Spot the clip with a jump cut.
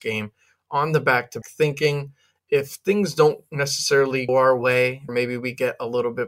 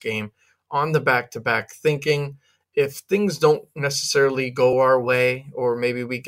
first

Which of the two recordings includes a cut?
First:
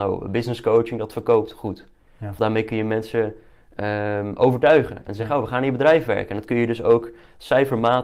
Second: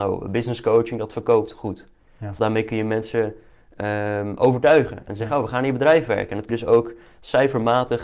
second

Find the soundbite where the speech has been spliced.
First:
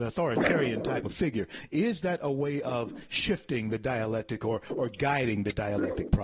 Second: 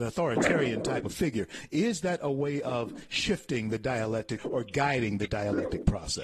second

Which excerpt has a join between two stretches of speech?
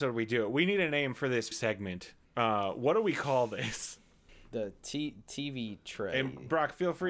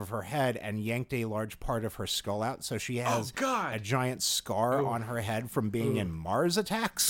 first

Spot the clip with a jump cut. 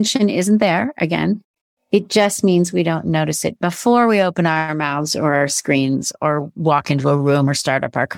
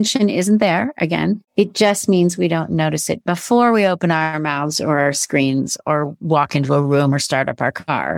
second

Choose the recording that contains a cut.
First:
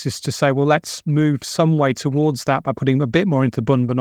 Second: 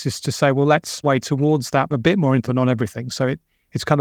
second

